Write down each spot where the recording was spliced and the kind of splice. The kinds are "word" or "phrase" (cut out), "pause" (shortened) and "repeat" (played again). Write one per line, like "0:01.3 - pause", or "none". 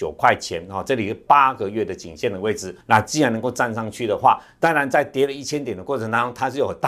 0:02.8 - pause